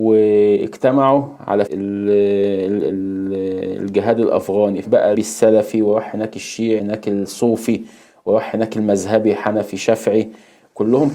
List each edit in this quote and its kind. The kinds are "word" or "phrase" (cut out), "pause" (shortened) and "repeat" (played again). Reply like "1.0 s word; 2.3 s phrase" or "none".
1.7 s word; 4.8 s phrase; 5.1 s word; 6.8 s word